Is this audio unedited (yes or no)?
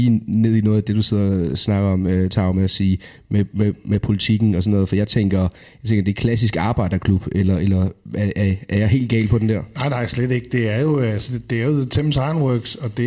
yes